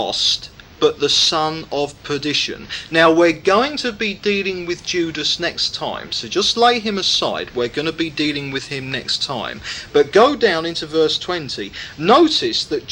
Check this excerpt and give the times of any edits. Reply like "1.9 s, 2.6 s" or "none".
none